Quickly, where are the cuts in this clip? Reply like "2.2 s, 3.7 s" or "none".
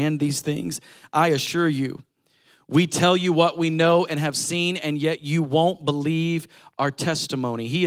none